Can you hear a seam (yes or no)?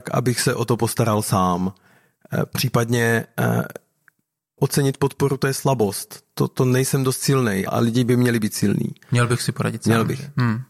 yes